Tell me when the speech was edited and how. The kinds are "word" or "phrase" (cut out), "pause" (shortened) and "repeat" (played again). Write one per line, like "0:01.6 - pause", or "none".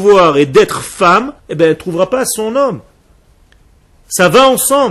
0:01.4 - pause